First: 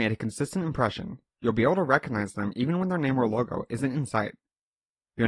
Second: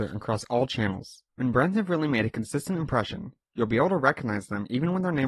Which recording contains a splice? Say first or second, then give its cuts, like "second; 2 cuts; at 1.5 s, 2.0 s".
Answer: second; 1 cut; at 1.3 s